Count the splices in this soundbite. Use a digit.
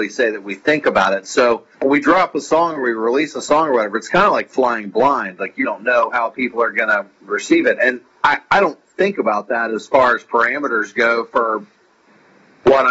2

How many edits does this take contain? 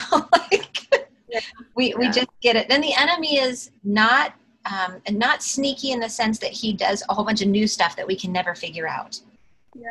4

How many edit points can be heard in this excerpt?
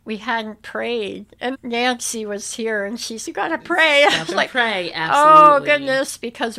2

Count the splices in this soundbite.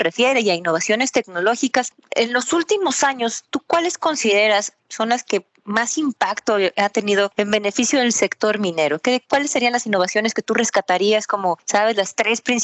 1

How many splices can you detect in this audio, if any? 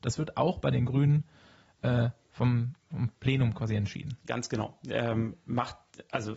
0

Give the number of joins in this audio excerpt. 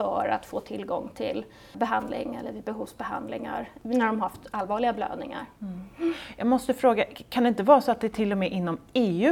0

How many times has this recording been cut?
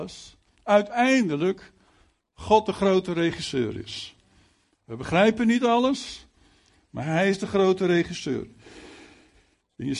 0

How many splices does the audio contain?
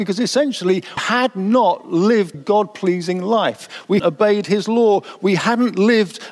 3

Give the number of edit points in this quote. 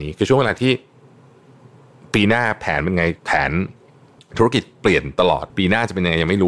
3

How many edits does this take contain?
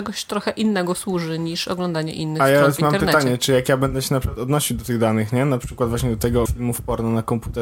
1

